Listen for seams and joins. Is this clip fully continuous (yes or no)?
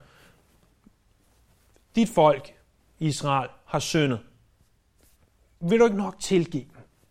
yes